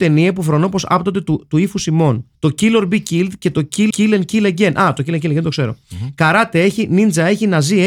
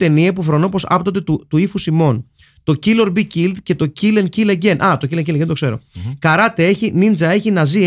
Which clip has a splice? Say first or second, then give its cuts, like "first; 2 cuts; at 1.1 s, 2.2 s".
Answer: first; 2 cuts; at 2.3 s, 3.9 s